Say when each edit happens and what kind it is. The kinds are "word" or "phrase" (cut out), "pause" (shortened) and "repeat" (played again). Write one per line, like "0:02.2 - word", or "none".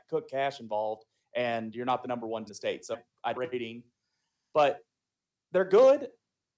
0:02.5 - word
0:02.9 - word
0:03.3 - phrase